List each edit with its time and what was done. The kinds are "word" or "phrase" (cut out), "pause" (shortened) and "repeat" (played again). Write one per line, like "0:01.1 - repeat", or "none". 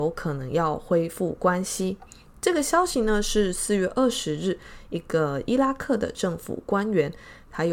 none